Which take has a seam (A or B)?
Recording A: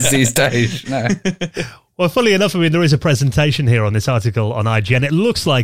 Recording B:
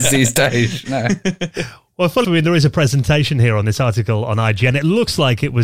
B